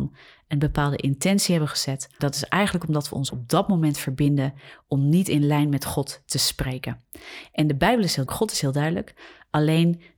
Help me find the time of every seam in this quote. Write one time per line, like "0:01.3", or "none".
0:02.2
0:03.3
0:08.3